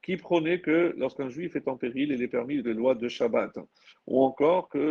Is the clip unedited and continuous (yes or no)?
no